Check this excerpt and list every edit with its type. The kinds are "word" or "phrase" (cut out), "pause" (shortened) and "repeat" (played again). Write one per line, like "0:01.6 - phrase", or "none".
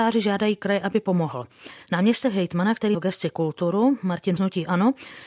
0:01.8 - pause
0:02.9 - word
0:04.4 - word